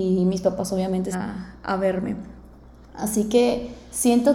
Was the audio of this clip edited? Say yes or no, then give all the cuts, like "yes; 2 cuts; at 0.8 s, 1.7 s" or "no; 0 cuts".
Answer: yes; 1 cut; at 1.1 s